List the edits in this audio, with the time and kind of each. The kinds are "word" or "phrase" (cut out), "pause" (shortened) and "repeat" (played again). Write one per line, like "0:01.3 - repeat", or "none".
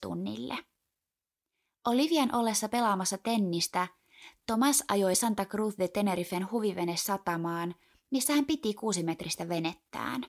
none